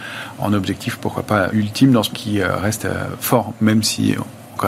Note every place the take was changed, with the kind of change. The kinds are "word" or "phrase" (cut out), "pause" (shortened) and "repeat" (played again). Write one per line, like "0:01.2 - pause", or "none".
0:01.5 - word
0:02.1 - word